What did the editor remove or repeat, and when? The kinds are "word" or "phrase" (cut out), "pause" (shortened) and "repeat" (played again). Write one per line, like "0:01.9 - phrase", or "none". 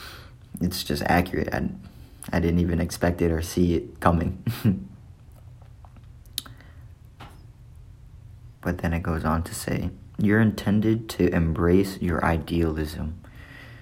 0:08.6 - pause